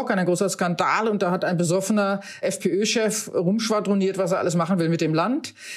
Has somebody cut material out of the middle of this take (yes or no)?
yes